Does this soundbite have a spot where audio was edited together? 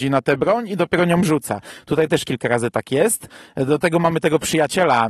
no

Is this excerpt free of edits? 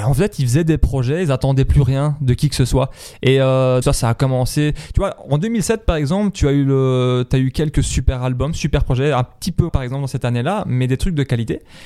no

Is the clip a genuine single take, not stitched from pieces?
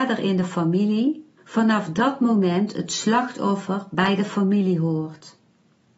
no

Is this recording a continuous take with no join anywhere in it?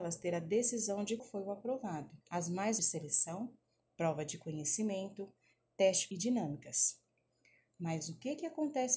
no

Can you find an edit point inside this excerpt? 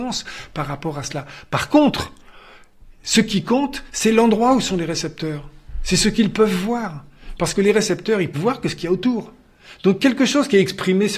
yes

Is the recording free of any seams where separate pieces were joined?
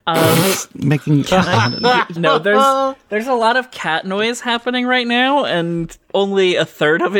no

